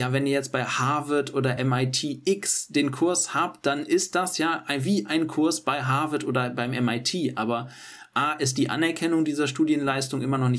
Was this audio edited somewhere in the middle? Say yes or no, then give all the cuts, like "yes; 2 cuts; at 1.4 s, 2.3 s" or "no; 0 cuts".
no; 0 cuts